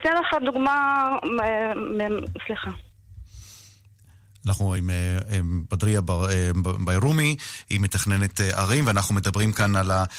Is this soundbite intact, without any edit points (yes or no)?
yes